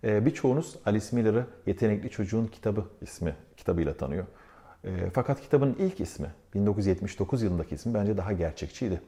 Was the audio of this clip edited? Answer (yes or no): no